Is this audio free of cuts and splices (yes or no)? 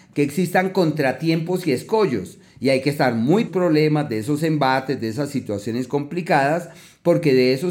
no